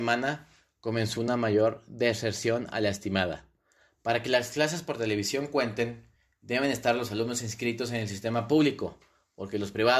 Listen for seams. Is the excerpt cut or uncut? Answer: uncut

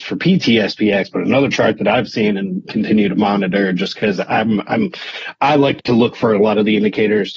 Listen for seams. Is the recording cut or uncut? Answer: uncut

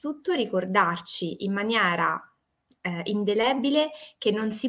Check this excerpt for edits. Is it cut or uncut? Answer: uncut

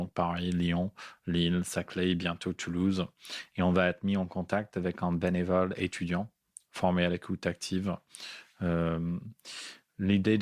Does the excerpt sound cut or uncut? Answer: uncut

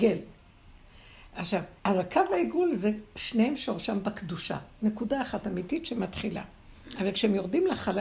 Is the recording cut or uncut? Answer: cut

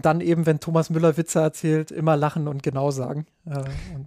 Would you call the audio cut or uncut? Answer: uncut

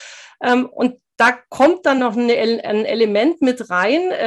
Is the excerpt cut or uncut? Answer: uncut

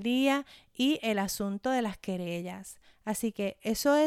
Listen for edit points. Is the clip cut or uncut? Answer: uncut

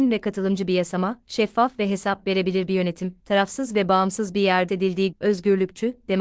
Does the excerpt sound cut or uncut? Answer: cut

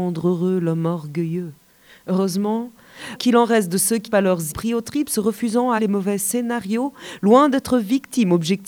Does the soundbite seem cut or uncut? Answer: cut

